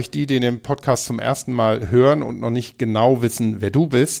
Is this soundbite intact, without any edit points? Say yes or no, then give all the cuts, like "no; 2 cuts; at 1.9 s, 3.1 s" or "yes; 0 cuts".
yes; 0 cuts